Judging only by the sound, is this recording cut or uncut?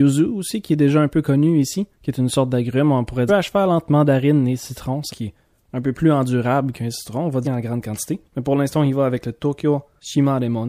cut